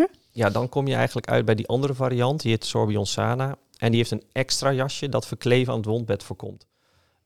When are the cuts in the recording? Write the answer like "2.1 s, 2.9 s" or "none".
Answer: none